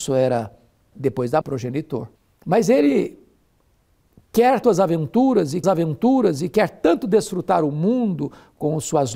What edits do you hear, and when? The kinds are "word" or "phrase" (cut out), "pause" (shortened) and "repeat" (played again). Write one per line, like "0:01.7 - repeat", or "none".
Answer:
0:00.9 - word
0:01.4 - phrase
0:02.2 - pause
0:04.6 - word
0:05.6 - repeat